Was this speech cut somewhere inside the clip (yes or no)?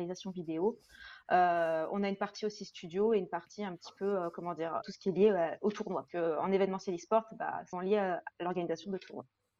yes